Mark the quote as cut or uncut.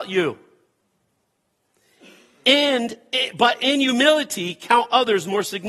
uncut